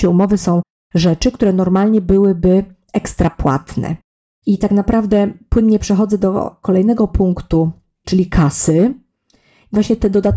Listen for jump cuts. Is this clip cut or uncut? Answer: uncut